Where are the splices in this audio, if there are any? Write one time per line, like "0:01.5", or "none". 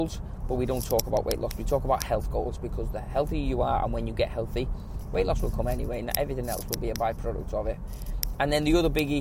none